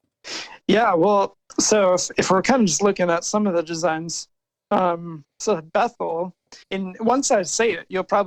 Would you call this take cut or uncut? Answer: cut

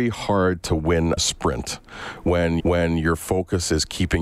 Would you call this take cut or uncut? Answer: cut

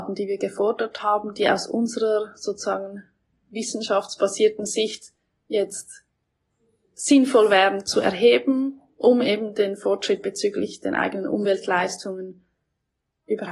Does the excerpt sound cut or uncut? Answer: uncut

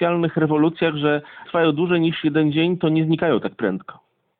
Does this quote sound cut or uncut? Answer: cut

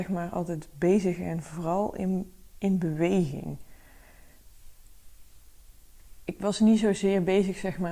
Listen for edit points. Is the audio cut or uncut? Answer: uncut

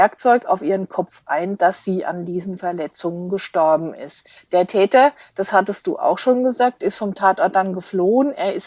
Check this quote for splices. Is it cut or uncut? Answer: cut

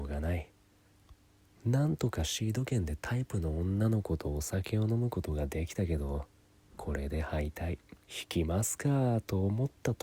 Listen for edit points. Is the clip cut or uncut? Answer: cut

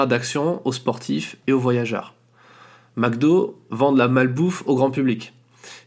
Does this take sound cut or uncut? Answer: uncut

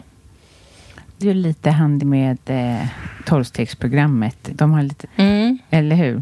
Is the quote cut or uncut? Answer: cut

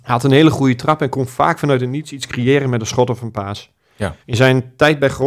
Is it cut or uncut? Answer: cut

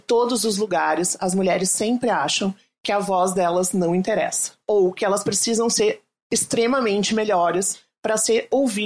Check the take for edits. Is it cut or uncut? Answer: uncut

